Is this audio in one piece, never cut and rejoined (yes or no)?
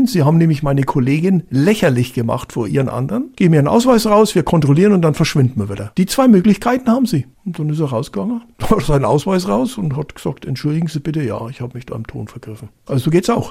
yes